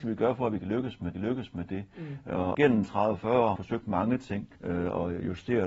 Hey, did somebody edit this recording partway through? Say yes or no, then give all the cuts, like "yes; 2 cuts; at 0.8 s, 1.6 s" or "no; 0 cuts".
yes; 4 cuts; at 1.1 s, 2.5 s, 3.6 s, 4.5 s